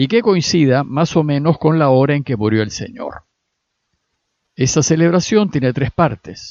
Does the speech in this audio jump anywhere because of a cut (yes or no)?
no